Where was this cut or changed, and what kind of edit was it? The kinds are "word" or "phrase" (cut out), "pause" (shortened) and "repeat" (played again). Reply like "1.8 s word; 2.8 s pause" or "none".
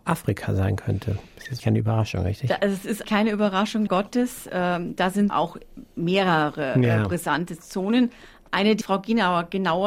1.6 s word; 3.0 s word; 3.9 s word; 5.3 s word; 8.8 s word

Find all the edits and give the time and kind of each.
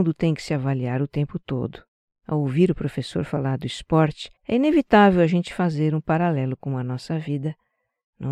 2.1 s pause; 4.4 s pause

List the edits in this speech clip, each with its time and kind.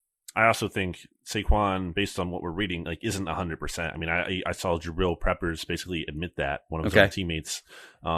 none

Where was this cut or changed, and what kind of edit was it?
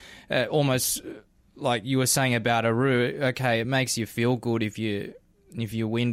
none

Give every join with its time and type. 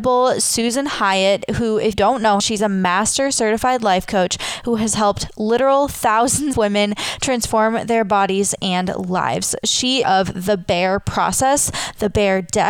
1.9 s word; 2.4 s word; 6.5 s word; 10.0 s phrase

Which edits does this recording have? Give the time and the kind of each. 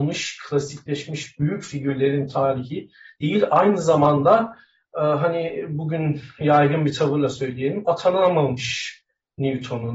none

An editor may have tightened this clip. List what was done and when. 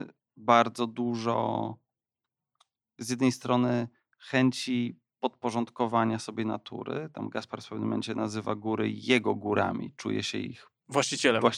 none

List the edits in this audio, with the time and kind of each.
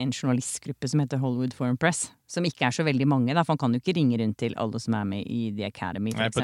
none

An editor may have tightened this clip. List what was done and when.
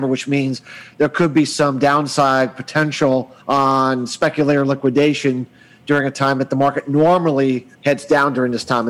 3.4 s pause; 7.7 s pause

